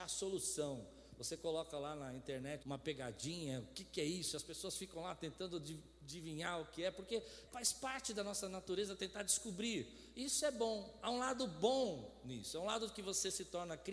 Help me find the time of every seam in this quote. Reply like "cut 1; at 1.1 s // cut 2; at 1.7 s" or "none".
cut 1; at 2.6 s // cut 2; at 7.5 s